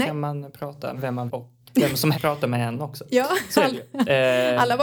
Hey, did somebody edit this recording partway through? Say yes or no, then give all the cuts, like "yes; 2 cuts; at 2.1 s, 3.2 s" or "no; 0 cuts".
yes; 4 cuts; at 0.9 s, 1.3 s, 1.6 s, 2.1 s